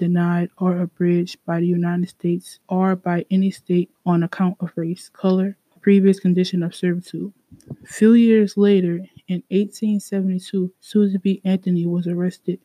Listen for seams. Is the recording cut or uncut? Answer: cut